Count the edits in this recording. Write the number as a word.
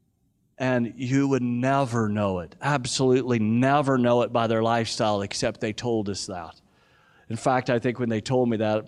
zero